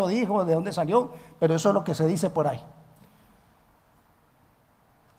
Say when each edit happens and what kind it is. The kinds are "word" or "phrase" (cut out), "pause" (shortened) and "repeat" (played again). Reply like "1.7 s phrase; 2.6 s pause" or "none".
none